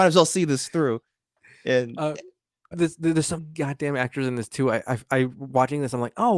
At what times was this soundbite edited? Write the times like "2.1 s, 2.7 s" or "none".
2.7 s, 3.4 s